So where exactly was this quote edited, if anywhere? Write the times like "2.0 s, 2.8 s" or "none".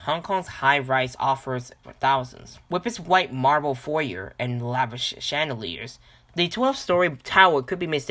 1.8 s, 2.6 s